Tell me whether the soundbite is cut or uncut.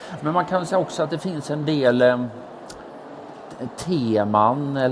uncut